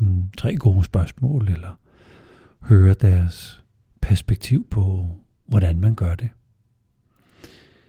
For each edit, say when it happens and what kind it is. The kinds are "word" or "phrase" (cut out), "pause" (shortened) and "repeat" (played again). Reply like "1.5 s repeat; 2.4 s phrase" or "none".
none